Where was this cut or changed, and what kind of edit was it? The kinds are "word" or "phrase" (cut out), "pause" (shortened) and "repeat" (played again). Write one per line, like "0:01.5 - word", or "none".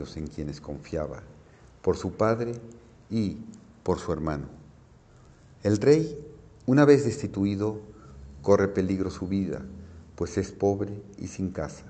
none